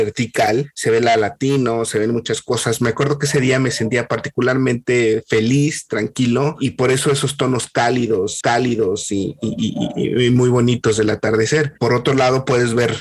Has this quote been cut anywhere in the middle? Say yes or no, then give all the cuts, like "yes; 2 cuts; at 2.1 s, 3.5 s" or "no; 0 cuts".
yes; 1 cut; at 8.4 s